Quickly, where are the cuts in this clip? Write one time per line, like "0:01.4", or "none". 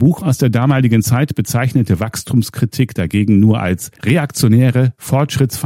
0:04.0